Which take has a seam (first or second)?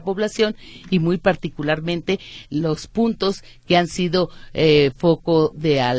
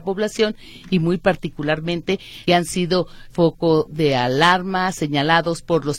second